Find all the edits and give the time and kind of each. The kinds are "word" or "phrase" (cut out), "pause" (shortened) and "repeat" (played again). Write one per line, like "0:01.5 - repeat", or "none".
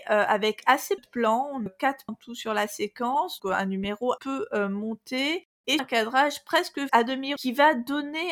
0:01.0 - word
0:01.7 - word
0:02.1 - word
0:03.4 - word
0:04.2 - word
0:05.8 - word
0:06.9 - word
0:07.4 - word